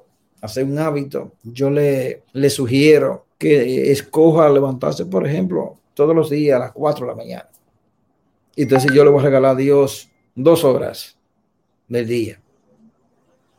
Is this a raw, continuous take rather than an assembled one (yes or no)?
no